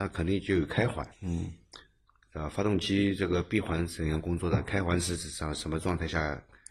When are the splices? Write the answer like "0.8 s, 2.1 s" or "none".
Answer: 1.1 s

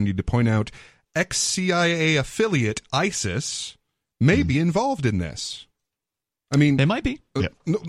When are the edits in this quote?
none

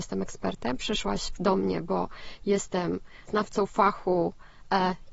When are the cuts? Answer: 1.3 s, 3.3 s

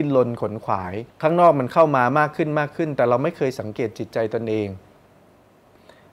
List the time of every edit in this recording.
1.1 s

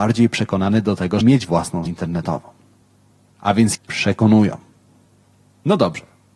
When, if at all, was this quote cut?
1.2 s, 1.9 s, 3.7 s

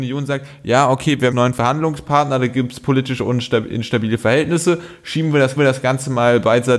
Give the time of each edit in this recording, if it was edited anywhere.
1.3 s, 5.6 s

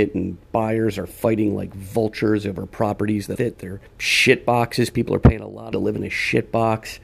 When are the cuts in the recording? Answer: 3.4 s, 3.9 s, 5.7 s

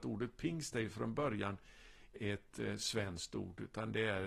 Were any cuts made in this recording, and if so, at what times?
2.1 s

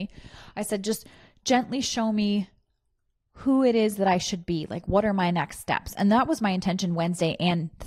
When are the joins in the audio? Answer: none

